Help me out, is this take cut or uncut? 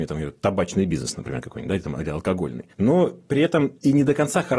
cut